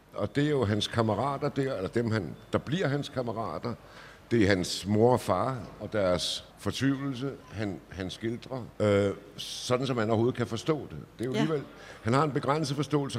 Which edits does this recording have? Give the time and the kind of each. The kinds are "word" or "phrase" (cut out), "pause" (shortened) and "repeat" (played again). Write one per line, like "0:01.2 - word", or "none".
0:06.5 - pause
0:08.8 - pause